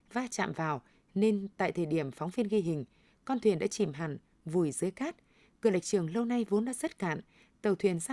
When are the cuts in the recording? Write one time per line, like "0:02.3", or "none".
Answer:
none